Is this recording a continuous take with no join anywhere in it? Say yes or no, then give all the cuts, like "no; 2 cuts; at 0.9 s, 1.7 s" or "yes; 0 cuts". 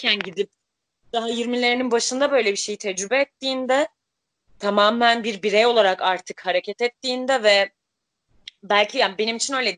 yes; 0 cuts